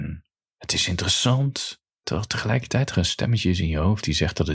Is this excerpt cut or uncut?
cut